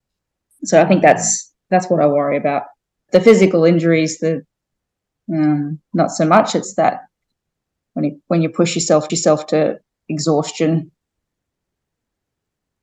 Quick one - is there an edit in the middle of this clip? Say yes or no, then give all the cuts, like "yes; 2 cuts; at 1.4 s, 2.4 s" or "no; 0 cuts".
yes; 4 cuts; at 1.6 s, 3.1 s, 5.9 s, 9.1 s